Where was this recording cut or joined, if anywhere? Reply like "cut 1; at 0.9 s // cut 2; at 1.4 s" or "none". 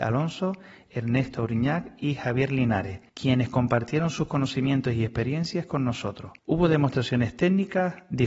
cut 1; at 3.1 s // cut 2; at 6.4 s